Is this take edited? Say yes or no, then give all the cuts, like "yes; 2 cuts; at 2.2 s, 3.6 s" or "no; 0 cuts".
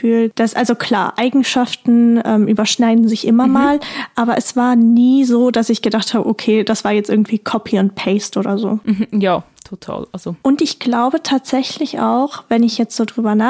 no; 0 cuts